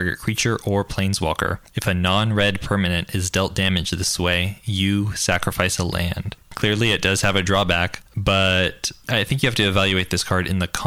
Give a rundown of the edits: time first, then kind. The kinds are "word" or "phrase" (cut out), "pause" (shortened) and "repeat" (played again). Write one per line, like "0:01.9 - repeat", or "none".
0:01.7 - pause
0:06.4 - pause